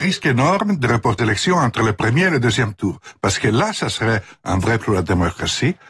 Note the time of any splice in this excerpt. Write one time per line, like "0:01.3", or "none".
0:01.2
0:04.8